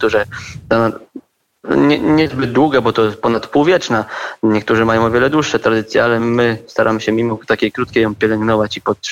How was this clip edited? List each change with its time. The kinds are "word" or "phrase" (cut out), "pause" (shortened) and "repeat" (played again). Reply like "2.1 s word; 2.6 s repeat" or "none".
none

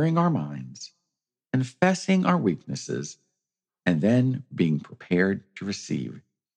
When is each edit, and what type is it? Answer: none

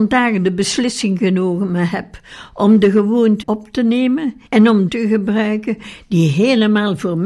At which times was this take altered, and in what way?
3.4 s word; 4.5 s pause; 4.9 s phrase

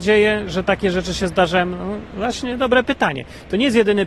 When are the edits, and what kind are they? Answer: none

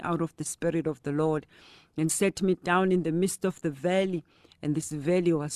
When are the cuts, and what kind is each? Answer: none

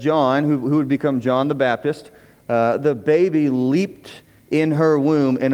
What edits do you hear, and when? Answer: none

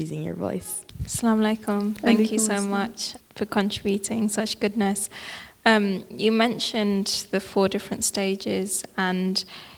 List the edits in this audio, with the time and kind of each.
3.2 s word

